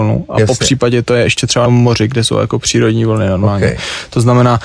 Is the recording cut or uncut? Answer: cut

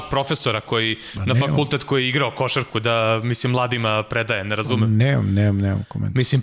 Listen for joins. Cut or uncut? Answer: uncut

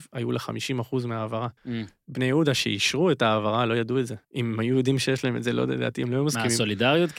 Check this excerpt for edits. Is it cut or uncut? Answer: cut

